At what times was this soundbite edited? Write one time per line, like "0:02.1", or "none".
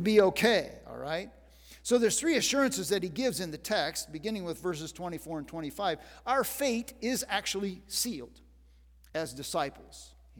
none

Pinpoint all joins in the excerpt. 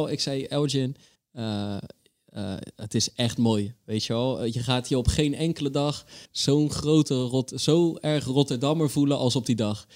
0:01.1
0:06.2

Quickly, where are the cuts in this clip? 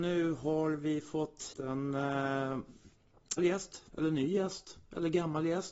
0:01.5
0:03.4
0:03.9

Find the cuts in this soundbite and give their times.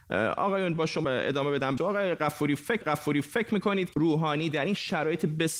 0:01.0
0:01.8
0:02.8
0:03.9

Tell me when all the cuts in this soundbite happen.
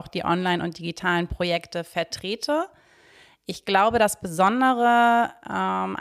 none

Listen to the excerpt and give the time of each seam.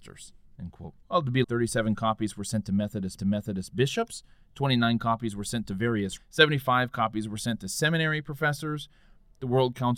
0:01.0
0:01.4
0:03.2
0:06.2

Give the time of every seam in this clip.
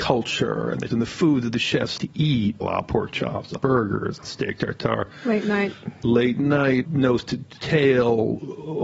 0:00.9
0:02.0
0:02.6
0:03.6
0:04.2
0:06.8

